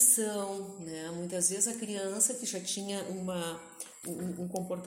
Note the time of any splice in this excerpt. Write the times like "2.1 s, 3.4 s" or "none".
none